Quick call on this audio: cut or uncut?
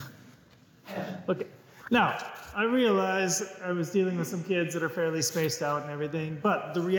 uncut